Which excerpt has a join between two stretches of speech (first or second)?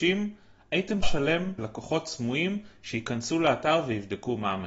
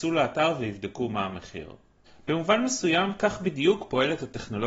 first